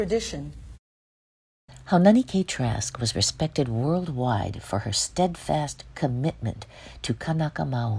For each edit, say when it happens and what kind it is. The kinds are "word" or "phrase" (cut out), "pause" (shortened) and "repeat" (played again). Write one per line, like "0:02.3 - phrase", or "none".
none